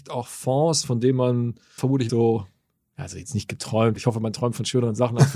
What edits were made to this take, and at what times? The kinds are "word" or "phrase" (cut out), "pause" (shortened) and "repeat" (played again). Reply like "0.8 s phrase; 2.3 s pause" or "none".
1.8 s word; 2.1 s word; 4.0 s word